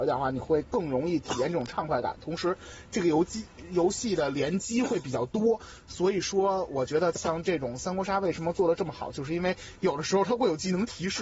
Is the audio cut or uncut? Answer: cut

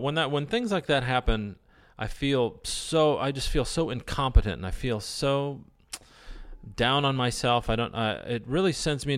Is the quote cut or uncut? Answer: uncut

